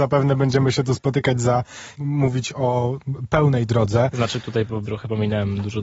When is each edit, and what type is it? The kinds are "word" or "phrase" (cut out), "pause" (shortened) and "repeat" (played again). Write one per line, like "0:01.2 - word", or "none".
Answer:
0:02.0 - phrase
0:03.7 - word
0:04.8 - word